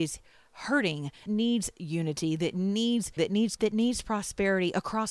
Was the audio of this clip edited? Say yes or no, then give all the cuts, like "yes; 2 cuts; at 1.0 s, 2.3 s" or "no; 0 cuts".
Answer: yes; 3 cuts; at 1.3 s, 3.2 s, 3.6 s